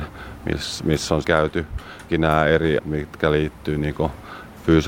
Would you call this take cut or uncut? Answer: cut